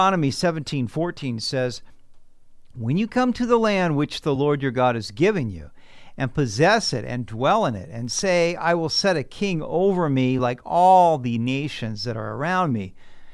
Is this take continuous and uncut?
yes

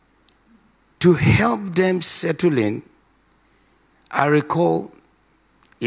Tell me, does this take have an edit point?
no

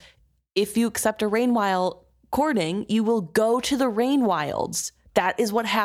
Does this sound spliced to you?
no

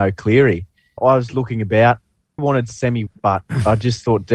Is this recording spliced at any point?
yes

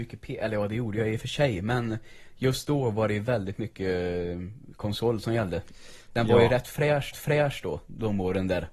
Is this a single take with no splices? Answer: no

